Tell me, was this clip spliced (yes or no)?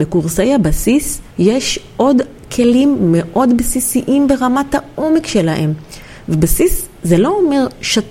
yes